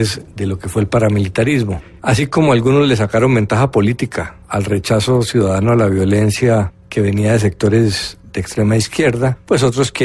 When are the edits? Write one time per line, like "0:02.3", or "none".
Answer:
none